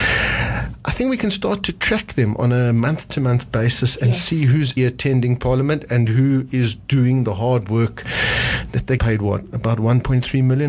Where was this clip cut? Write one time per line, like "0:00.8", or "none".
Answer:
0:04.8
0:09.0